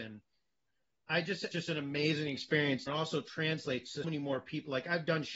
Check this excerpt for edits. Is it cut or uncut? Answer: cut